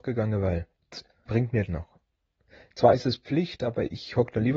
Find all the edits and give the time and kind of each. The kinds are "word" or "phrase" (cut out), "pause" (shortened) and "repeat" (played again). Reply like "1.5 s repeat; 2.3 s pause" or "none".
1.3 s word; 1.7 s word